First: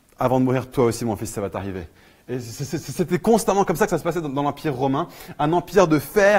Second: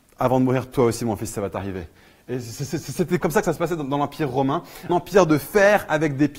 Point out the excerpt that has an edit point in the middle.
second; 2 cuts; at 3.2 s, 4.9 s

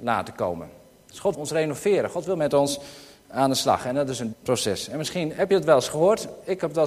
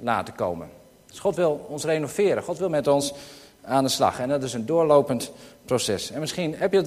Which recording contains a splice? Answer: first; 2 cuts; at 1.3 s, 4.3 s

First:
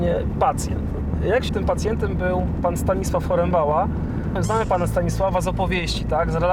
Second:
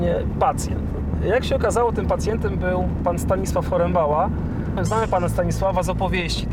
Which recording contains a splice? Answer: first; 1 cut; at 1.5 s

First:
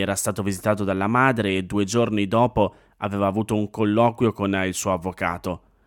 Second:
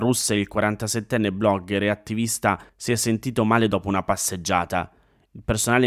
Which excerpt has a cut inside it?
second; 1 cut; at 2.7 s

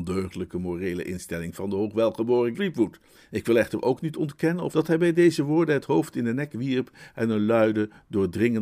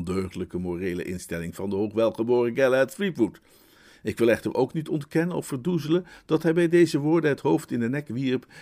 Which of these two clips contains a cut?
first; 3 cuts; at 2.5 s, 3.1 s, 4.7 s

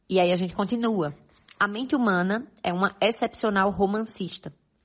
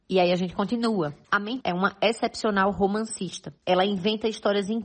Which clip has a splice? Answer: second; 3 cuts; at 1.2 s, 1.6 s, 3.6 s

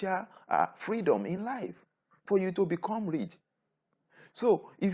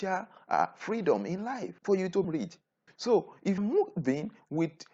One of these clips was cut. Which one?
second; 4 cuts; at 1.8 s, 2.2 s, 2.9 s, 3.6 s

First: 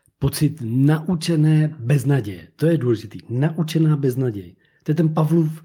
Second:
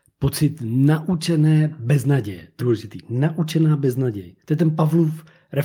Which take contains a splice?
second; 2 cuts; at 2.6 s, 4.4 s

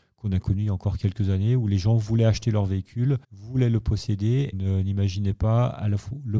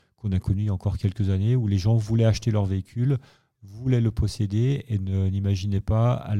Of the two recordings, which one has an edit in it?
first; 2 cuts; at 3.2 s, 4.5 s

